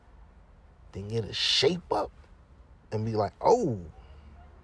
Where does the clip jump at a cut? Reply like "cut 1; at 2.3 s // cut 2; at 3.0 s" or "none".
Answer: none

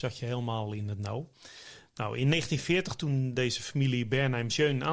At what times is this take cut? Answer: none

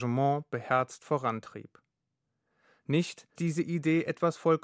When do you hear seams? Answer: cut 1; at 3.4 s

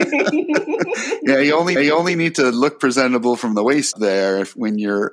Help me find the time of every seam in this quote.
cut 1; at 1.8 s // cut 2; at 3.9 s

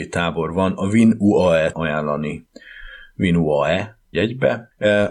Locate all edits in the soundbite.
cut 1; at 1.7 s // cut 2; at 4.1 s

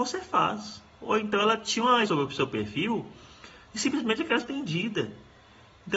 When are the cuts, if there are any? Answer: cut 1; at 2.1 s // cut 2; at 4.4 s

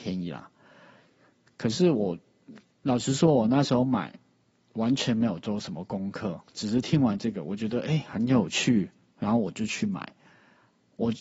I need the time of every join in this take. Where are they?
none

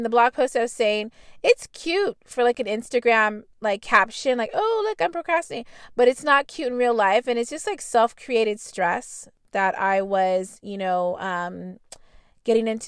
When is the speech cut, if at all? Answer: cut 1; at 3.5 s

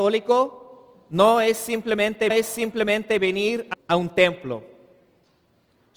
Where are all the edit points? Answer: cut 1; at 2.3 s // cut 2; at 3.7 s

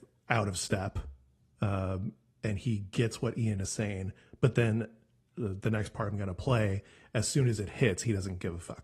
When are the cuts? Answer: none

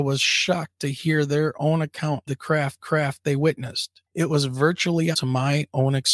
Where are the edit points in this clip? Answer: cut 1; at 2.3 s // cut 2; at 2.8 s // cut 3; at 4.1 s // cut 4; at 5.1 s

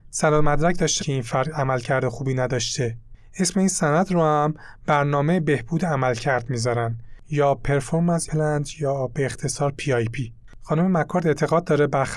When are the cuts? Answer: cut 1; at 1.0 s // cut 2; at 8.3 s

